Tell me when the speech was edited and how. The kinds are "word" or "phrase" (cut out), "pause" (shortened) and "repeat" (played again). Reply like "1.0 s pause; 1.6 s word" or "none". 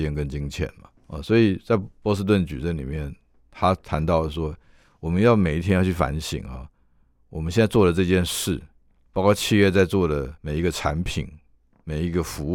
1.0 s pause; 10.4 s pause